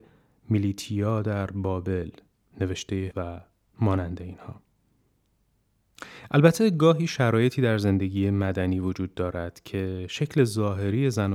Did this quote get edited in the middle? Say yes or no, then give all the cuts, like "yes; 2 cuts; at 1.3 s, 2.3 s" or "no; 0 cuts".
yes; 1 cut; at 3.1 s